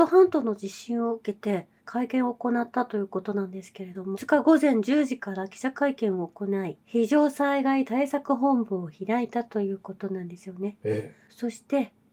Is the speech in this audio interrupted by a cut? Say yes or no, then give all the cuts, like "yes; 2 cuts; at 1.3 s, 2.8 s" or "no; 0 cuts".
yes; 3 cuts; at 1.8 s, 4.1 s, 6.8 s